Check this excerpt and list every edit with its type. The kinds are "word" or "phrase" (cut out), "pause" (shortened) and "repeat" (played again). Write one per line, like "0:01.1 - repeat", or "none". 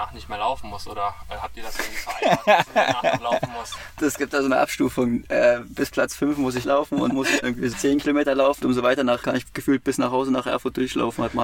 0:02.7 - word
0:06.6 - word
0:07.1 - word
0:07.4 - word
0:07.7 - word
0:08.6 - word
0:09.2 - word

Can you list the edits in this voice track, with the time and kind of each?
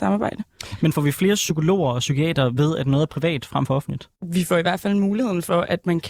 0:04.2 - pause

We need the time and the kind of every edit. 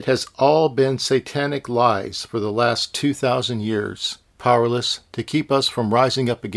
0:04.4 - phrase

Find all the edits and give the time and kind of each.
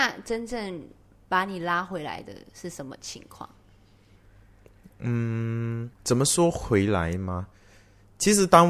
0:01.0 - pause
0:05.9 - pause

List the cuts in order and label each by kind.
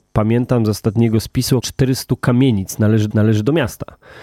0:01.6 - word
0:03.1 - repeat

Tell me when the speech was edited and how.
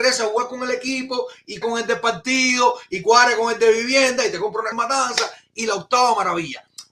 0:01.6 - word
0:04.7 - word

